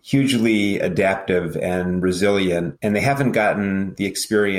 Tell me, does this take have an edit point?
no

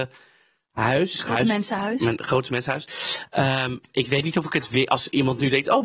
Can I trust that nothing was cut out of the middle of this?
yes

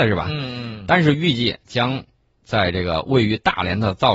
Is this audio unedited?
yes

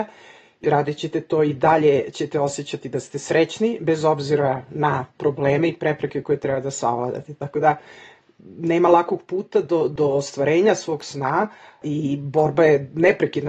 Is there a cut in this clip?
no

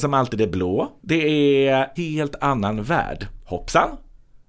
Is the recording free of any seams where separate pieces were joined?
no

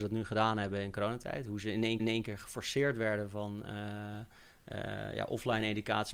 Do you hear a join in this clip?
yes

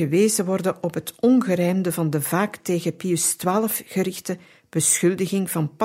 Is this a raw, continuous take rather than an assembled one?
yes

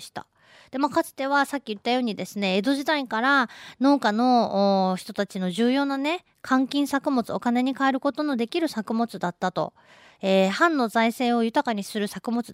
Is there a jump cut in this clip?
no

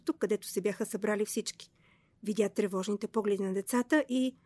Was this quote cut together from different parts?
no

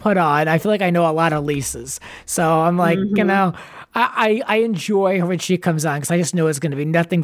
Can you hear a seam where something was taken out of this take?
no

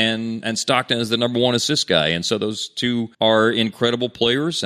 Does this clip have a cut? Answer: yes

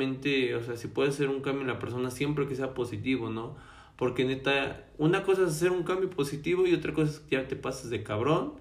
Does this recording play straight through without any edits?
yes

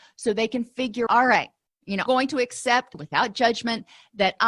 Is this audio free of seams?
no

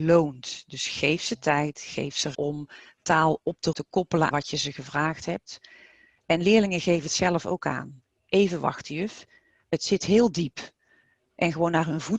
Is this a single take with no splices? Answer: no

